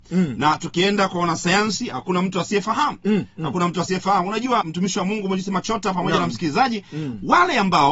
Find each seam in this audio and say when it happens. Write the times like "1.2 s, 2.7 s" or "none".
4.6 s